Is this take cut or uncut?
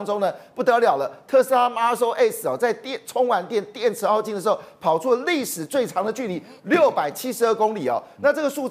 uncut